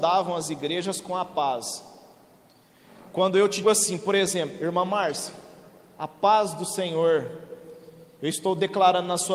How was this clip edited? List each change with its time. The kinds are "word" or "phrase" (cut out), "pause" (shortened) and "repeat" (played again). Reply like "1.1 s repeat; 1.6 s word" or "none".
3.6 s word